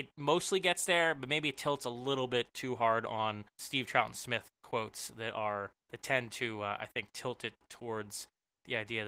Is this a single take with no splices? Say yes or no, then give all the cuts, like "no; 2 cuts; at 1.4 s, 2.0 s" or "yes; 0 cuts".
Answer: no; 2 cuts; at 3.5 s, 5.7 s